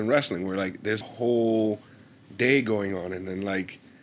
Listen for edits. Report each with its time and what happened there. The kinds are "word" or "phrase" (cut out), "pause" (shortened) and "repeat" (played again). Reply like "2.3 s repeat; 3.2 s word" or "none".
1.0 s word